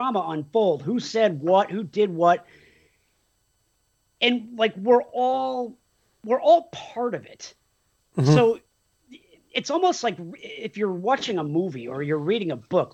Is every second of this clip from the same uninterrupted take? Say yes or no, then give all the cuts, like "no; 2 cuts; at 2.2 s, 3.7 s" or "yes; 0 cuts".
yes; 0 cuts